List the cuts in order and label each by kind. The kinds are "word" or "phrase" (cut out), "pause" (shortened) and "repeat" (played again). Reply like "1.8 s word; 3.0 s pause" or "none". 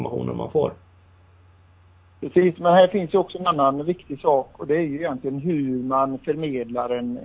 none